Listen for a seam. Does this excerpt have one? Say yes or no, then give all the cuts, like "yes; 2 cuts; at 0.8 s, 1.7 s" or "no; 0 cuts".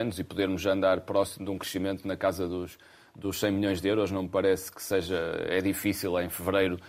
no; 0 cuts